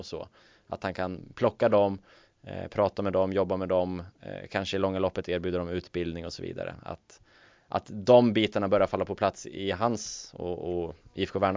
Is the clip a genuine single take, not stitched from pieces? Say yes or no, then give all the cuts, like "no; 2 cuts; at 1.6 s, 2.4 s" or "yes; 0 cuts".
yes; 0 cuts